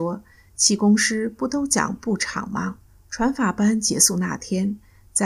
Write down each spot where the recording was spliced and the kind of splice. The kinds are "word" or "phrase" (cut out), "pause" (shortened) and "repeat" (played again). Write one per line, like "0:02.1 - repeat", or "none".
0:02.9 - pause